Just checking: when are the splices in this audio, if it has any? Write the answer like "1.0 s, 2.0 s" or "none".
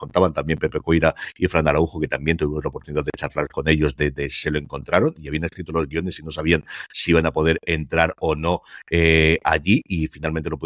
none